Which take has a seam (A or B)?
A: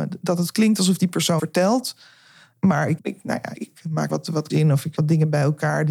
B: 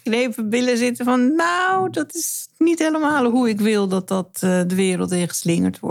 A